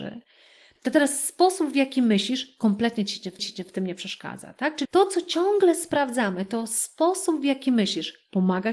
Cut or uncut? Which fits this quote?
cut